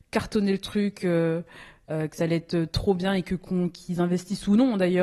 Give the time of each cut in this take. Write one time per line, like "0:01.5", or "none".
none

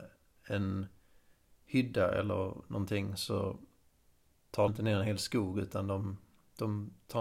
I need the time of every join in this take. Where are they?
0:04.7

